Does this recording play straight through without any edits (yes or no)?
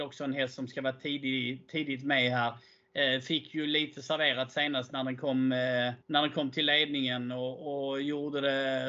no